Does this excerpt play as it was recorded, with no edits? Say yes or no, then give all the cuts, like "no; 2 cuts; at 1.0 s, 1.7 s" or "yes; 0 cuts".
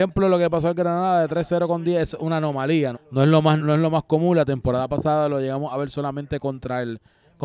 no; 2 cuts; at 2.9 s, 3.6 s